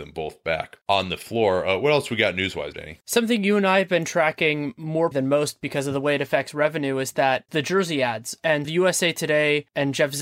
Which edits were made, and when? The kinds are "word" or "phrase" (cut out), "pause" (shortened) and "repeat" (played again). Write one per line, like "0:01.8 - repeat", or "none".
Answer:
0:02.7 - word
0:05.1 - word
0:07.5 - word
0:08.6 - word